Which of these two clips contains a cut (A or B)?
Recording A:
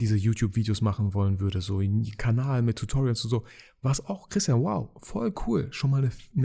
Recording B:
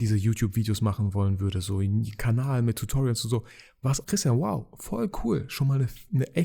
B